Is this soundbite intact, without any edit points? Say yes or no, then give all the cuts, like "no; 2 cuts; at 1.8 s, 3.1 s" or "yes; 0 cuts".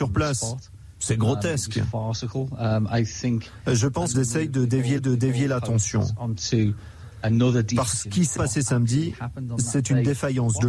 no; 4 cuts; at 4.1 s, 5.0 s, 7.9 s, 8.4 s